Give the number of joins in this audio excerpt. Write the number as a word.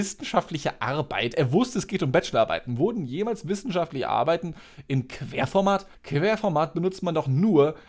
two